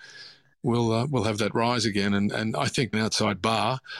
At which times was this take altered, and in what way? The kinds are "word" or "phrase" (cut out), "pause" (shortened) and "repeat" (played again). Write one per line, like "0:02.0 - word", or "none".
0:02.9 - word

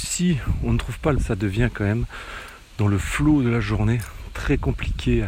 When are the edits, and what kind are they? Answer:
0:01.2 - word

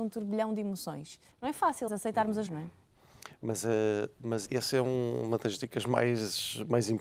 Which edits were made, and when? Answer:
0:01.3 - pause
0:01.9 - phrase
0:02.5 - phrase
0:04.5 - word

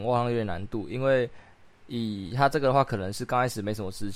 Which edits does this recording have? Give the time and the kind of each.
none

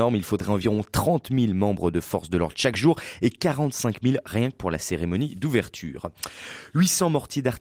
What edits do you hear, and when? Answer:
none

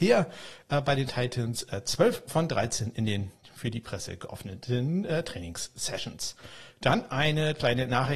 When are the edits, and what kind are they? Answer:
none

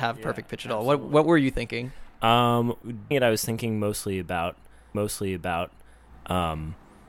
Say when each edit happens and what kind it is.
0:03.1 - word
0:04.9 - repeat

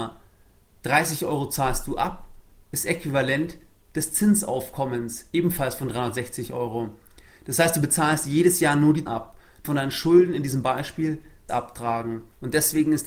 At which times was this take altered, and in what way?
0:09.1 - word
0:09.6 - word
0:11.5 - word

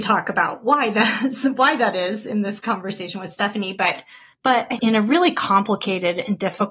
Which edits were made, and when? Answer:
0:04.8 - phrase

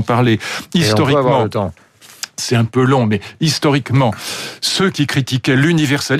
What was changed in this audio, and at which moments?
none

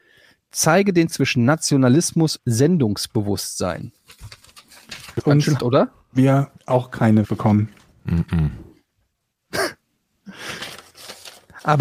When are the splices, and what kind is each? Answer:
0:01.1 - word
0:02.4 - word
0:05.2 - word
0:05.6 - word
0:06.6 - word
0:07.2 - word

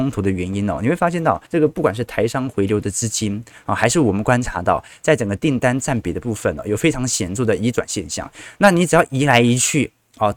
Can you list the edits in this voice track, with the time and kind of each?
0:01.5 - pause

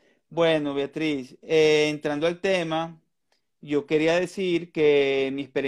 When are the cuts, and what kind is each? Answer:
none

